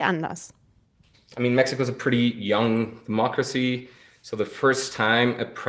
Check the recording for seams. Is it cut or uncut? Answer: uncut